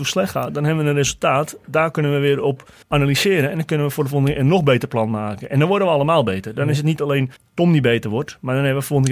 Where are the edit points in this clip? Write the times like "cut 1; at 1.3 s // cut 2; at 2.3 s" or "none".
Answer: cut 1; at 2.8 s // cut 2; at 7.4 s